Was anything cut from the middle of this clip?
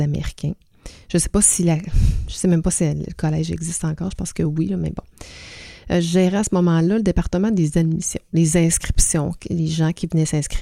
no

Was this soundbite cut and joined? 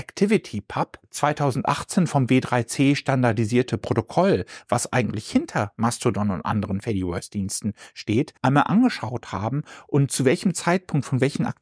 yes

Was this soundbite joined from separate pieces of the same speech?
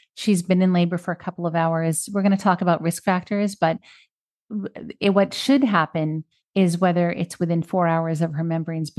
no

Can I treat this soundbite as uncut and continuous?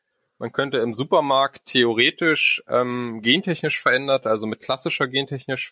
yes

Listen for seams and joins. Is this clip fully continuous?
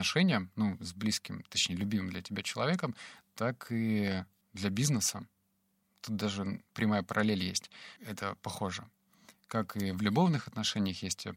no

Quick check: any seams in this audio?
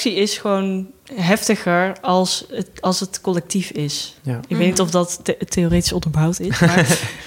no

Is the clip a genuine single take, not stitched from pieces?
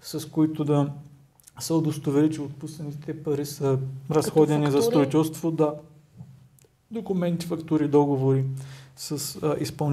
yes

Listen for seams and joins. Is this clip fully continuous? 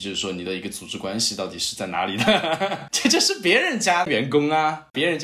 no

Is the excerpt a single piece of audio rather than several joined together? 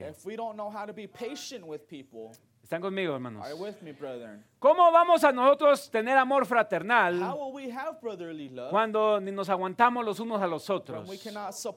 yes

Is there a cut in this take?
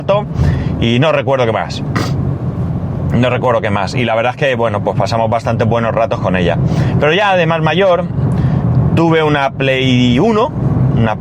no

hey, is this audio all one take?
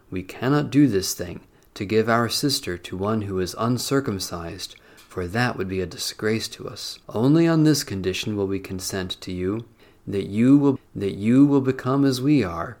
no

